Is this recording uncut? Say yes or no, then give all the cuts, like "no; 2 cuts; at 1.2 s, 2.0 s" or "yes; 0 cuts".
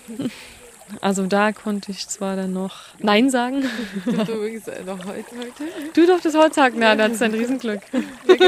no; 2 cuts; at 2.9 s, 5.3 s